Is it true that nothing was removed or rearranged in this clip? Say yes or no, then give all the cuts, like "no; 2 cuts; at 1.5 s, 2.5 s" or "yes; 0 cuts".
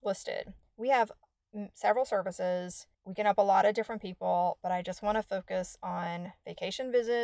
no; 1 cut; at 2.9 s